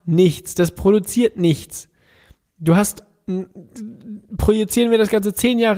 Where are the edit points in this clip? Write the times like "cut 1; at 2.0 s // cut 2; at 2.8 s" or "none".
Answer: none